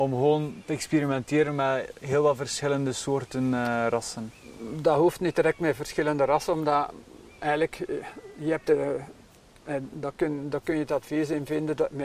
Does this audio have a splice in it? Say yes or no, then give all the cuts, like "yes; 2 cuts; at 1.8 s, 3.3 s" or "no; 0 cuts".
no; 0 cuts